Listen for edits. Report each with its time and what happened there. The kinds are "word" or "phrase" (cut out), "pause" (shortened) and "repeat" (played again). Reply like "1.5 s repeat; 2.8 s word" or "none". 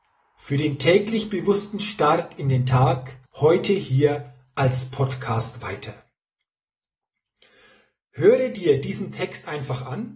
3.3 s pause